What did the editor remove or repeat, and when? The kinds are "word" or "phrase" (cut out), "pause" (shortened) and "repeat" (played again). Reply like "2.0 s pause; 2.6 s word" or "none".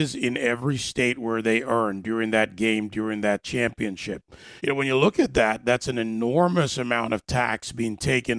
4.6 s pause

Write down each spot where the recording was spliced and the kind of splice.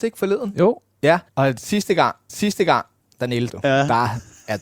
1.3 s pause; 2.3 s repeat; 3.5 s phrase

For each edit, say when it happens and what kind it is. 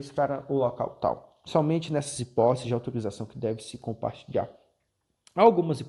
none

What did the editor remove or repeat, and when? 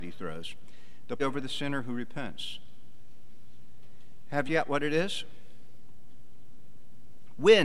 1.2 s word; 4.5 s phrase

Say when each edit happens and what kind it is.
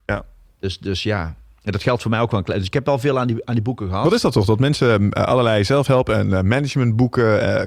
none

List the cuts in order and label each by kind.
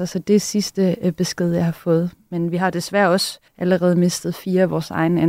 3.5 s pause

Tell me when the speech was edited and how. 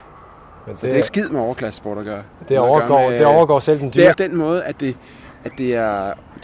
1.0 s word; 4.1 s phrase

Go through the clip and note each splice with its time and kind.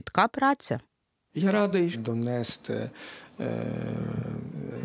1.9 s phrase

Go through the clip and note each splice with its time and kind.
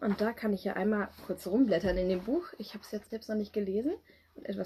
3.0 s word

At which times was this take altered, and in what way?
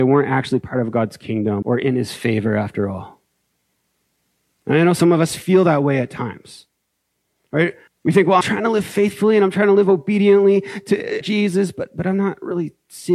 1.6 s word; 7.9 s pause; 8.4 s word; 11.2 s phrase

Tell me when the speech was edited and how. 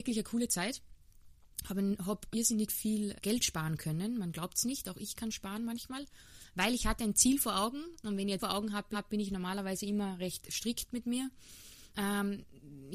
2.3 s word; 3.2 s word; 8.4 s word; 8.9 s repeat; 11.9 s pause

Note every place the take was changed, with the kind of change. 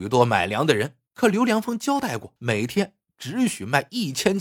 1.1 s pause; 2.4 s pause

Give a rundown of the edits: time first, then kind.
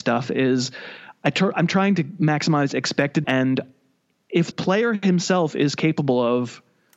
3.2 s word; 4.5 s word

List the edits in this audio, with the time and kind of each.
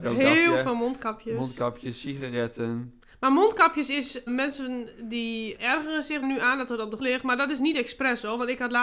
4.3 s word; 5.6 s word; 6.2 s word; 7.0 s word

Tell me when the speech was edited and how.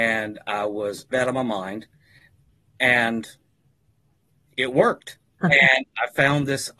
1.1 s word; 5.4 s word

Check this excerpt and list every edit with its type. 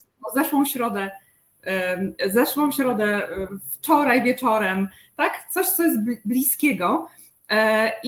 none

